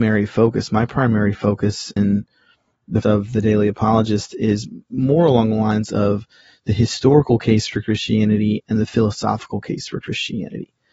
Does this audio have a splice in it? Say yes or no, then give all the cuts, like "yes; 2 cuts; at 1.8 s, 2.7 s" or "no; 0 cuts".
yes; 2 cuts; at 2.0 s, 3.0 s